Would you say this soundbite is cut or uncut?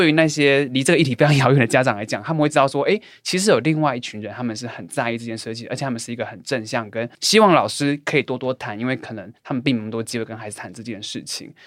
cut